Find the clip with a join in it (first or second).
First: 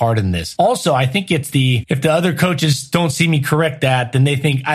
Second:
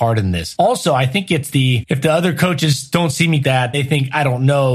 second